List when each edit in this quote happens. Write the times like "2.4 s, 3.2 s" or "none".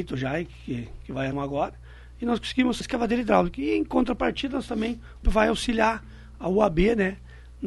1.3 s, 2.8 s, 5.2 s